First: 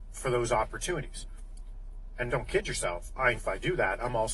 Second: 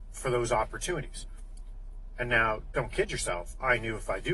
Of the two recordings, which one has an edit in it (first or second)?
first